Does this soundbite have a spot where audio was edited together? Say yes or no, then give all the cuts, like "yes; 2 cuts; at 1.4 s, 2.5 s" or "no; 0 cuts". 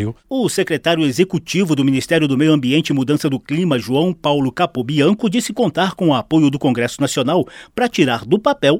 no; 0 cuts